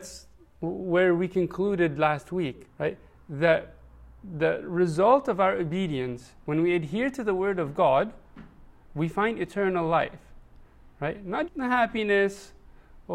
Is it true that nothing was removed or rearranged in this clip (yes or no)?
no